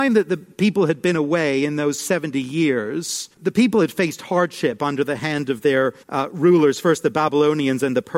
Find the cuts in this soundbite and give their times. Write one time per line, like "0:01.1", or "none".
0:03.3
0:06.0